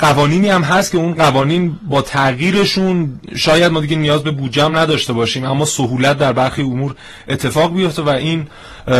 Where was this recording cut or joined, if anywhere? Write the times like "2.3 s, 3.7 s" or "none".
none

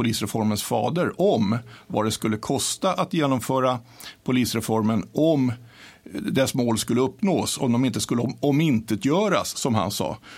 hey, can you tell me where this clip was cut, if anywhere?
none

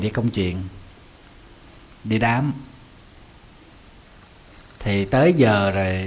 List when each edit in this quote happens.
none

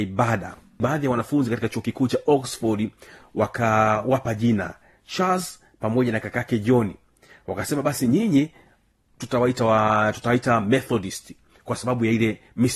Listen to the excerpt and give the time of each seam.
none

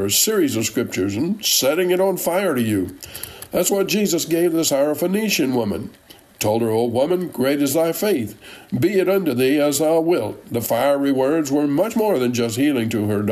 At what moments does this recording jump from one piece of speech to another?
none

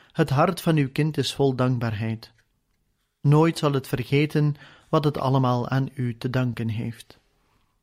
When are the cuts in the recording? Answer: none

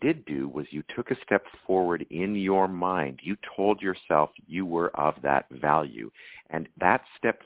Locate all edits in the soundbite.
none

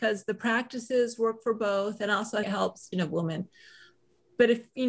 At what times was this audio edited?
2.4 s, 2.9 s

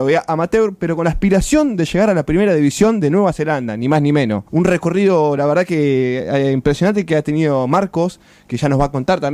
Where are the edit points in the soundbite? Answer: 4.5 s

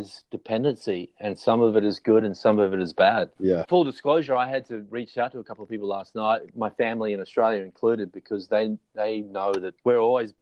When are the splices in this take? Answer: none

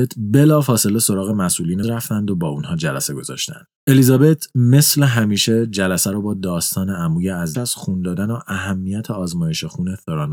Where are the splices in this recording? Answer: 1.8 s, 3.8 s, 7.5 s

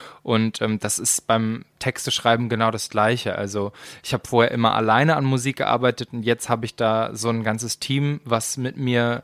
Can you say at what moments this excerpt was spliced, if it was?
none

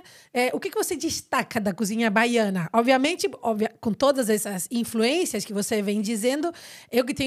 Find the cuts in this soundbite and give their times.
none

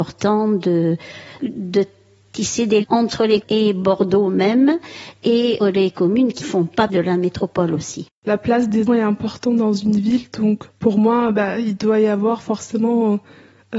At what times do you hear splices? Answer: 1.4 s, 2.8 s, 3.4 s, 5.6 s, 6.4 s, 6.9 s, 8.9 s, 10.7 s

